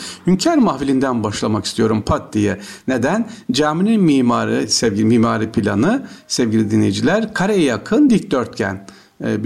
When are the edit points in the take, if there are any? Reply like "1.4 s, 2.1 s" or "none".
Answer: none